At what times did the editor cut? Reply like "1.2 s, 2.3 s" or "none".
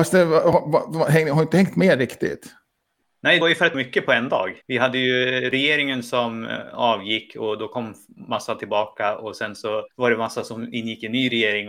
3.4 s, 3.7 s, 4.6 s, 9.9 s